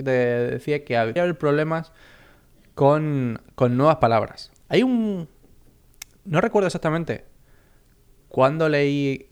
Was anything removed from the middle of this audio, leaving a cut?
yes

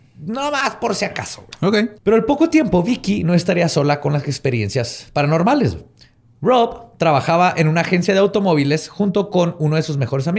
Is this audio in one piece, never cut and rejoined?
no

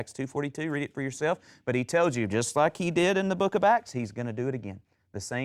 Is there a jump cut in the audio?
no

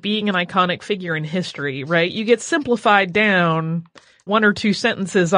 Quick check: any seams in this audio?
yes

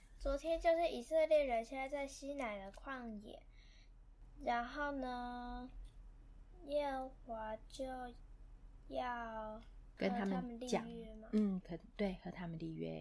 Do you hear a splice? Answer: yes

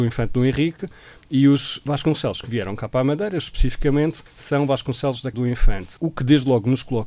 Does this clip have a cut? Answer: yes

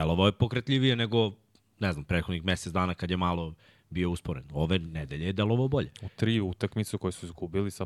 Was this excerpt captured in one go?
yes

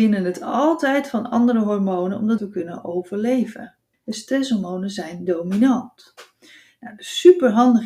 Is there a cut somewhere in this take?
yes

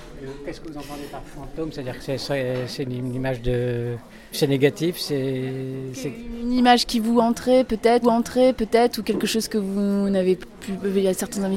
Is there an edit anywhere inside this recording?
yes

